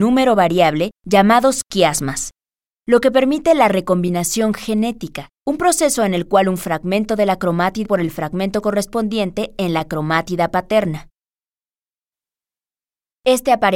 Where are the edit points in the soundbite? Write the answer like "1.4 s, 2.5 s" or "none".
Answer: 1.0 s, 5.3 s, 7.9 s